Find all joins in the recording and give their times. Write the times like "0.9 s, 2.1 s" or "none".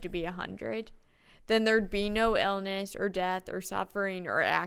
none